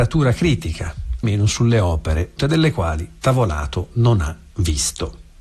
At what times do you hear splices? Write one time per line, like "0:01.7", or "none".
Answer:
0:01.2
0:02.4